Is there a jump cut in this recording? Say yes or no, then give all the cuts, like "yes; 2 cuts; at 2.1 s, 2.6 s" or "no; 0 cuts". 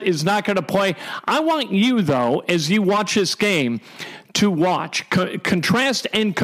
no; 0 cuts